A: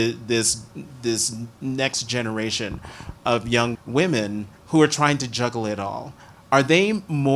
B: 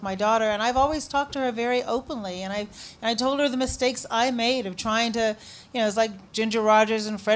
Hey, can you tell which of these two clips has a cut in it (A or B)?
A